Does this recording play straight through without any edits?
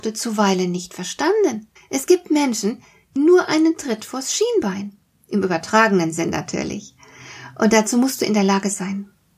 no; 2 cuts; at 1.8 s, 3.2 s

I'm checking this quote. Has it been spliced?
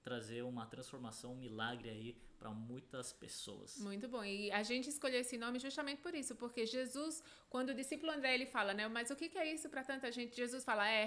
no; 0 cuts

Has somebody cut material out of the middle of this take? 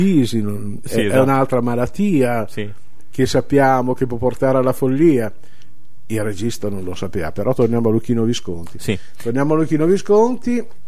no; 0 cuts

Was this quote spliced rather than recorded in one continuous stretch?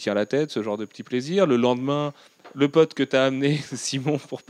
no; 0 cuts

